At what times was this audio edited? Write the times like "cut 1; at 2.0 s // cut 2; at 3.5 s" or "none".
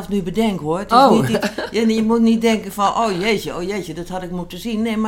none